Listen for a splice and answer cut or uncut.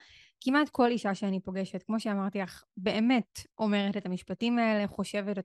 cut